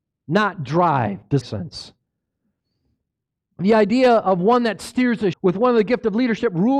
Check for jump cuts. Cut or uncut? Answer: cut